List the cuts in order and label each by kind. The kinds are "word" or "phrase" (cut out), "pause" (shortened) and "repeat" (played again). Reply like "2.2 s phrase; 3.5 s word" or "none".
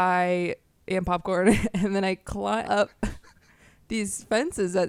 2.7 s word